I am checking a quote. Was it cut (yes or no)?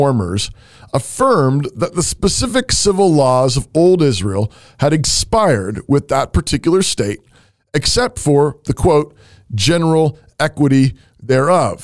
no